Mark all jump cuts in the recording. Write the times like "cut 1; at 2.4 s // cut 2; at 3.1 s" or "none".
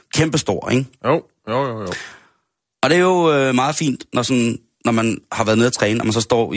none